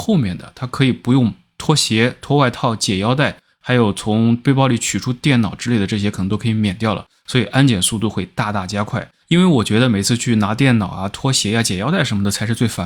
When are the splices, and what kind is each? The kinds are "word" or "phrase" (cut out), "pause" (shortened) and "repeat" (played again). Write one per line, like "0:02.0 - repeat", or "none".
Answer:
0:09.2 - pause